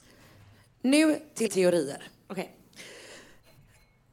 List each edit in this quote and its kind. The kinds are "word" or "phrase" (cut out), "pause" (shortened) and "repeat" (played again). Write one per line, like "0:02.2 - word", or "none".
0:01.5 - word